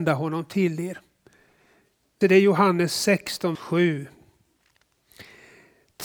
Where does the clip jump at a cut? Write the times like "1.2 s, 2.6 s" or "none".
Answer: 2.2 s, 3.5 s